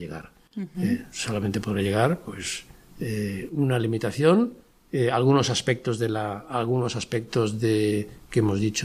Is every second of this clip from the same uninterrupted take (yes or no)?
yes